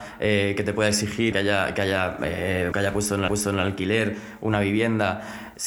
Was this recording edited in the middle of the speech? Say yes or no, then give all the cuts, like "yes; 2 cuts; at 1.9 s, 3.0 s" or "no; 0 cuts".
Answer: yes; 3 cuts; at 1.3 s, 2.7 s, 3.3 s